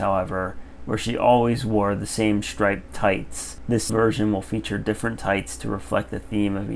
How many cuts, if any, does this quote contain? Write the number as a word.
one